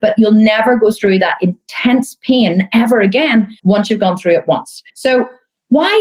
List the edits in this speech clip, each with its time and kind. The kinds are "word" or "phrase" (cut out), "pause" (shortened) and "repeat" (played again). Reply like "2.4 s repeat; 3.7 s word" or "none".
3.6 s pause; 4.9 s pause